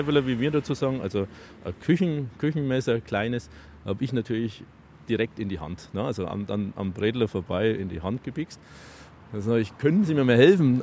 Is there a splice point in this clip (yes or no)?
no